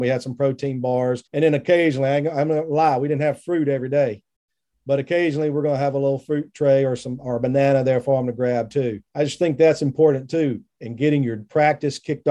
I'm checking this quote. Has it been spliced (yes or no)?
yes